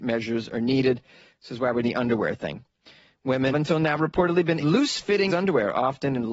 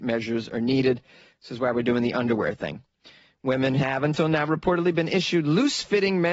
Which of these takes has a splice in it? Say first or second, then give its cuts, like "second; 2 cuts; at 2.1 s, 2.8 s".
first; 4 cuts; at 1.8 s, 3.5 s, 4.6 s, 5.3 s